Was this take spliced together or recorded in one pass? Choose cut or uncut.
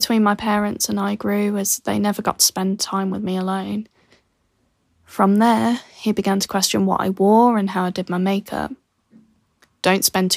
uncut